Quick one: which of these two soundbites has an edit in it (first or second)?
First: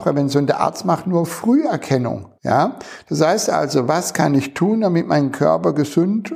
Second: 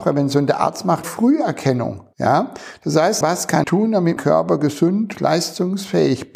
second